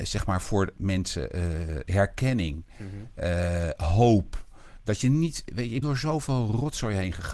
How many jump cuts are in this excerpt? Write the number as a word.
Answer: one